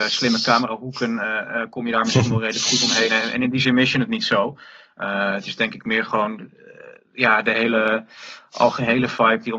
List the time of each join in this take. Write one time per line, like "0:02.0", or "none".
none